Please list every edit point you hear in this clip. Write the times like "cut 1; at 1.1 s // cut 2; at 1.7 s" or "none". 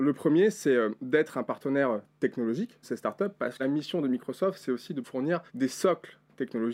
cut 1; at 2.8 s // cut 2; at 3.6 s // cut 3; at 5.0 s // cut 4; at 5.5 s